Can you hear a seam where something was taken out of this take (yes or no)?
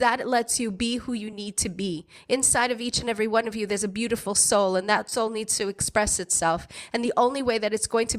no